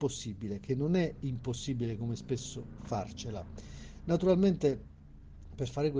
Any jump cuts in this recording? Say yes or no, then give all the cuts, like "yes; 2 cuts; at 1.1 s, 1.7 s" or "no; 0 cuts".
yes; 1 cut; at 2.8 s